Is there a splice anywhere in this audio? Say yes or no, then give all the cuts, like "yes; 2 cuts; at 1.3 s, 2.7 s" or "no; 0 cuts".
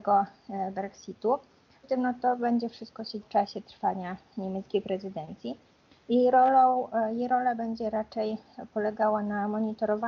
yes; 2 cuts; at 1.8 s, 3.2 s